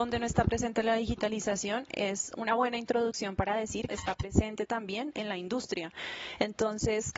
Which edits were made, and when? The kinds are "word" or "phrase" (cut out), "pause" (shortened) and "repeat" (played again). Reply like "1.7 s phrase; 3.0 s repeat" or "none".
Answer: 3.9 s phrase